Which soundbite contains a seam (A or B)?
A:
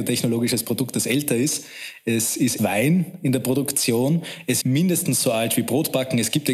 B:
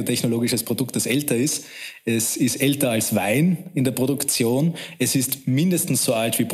A